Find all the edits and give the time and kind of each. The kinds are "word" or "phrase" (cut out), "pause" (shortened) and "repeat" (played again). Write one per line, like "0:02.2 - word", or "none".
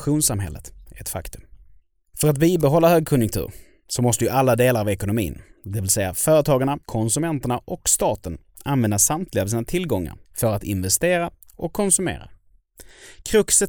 0:01.8 - pause
0:06.8 - pause
0:10.2 - pause